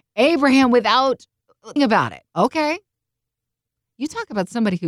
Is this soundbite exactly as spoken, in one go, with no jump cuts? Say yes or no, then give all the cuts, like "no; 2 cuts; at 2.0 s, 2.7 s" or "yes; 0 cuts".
no; 2 cuts; at 1.8 s, 2.3 s